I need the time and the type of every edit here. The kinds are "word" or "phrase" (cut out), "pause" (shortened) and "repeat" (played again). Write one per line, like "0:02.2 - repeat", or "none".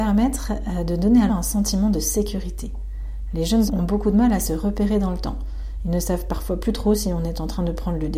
0:01.3 - word
0:03.7 - word